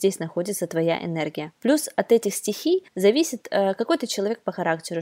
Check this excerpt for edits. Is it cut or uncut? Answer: cut